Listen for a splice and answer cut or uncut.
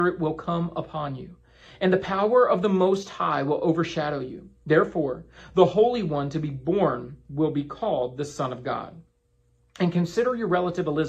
uncut